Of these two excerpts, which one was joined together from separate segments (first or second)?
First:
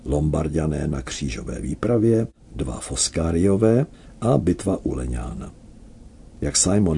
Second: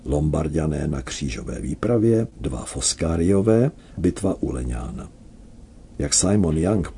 second